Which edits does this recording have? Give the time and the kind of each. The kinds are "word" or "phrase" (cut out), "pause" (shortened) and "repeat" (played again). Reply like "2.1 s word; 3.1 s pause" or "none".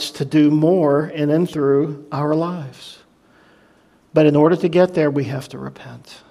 none